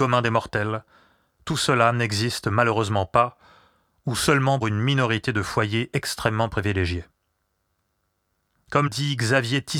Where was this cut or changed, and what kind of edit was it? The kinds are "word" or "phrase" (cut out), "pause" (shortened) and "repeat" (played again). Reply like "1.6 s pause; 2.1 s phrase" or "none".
4.6 s word; 8.9 s word